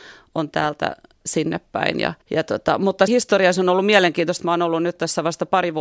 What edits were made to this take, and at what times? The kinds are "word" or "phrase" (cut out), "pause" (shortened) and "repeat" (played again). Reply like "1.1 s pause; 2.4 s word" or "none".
2.2 s pause; 3.1 s word